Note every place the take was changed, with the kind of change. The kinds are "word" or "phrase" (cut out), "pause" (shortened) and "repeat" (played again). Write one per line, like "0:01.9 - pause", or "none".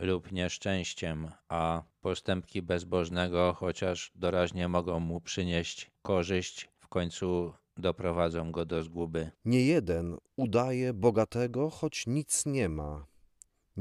0:01.4 - pause
0:09.3 - pause